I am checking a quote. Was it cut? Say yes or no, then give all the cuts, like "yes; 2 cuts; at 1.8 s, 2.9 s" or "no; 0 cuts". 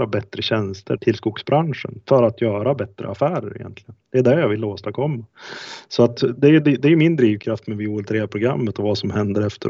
yes; 2 cuts; at 1.0 s, 4.0 s